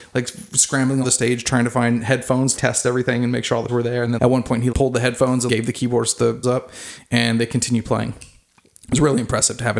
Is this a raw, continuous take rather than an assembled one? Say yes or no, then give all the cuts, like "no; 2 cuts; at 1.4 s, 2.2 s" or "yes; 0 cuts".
no; 7 cuts; at 1.0 s, 2.6 s, 3.7 s, 4.2 s, 4.7 s, 5.5 s, 6.4 s